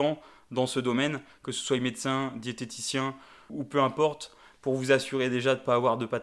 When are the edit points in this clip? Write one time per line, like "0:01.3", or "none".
0:03.5

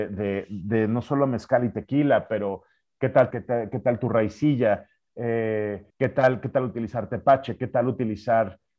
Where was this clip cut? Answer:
0:03.3
0:05.9

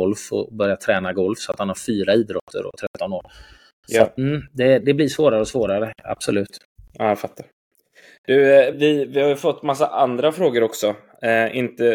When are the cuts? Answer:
0:04.2
0:04.8
0:08.7

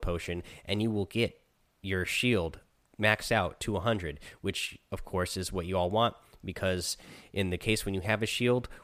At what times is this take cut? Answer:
none

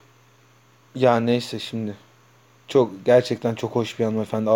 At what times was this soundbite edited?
none

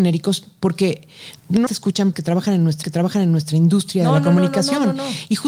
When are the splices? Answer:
0:01.7
0:02.1
0:02.8

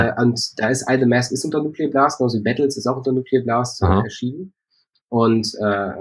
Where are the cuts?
none

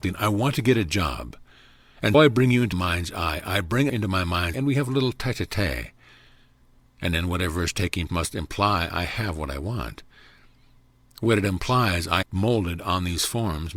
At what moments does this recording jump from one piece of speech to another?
0:02.1
0:02.7
0:03.9
0:04.5
0:08.1
0:12.2

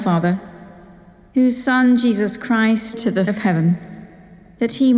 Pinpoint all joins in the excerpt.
0:02.9
0:03.3

